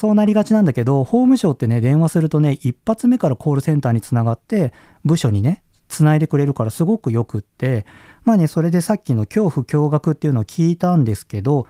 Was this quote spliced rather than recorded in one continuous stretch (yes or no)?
no